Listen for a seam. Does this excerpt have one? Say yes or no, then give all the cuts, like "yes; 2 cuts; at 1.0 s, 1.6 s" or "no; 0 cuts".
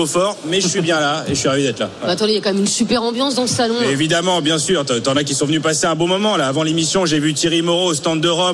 no; 0 cuts